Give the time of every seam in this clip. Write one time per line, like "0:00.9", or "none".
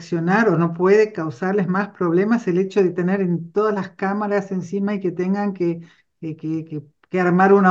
none